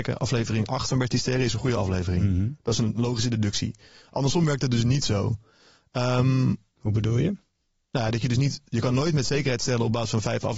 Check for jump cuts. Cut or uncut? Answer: uncut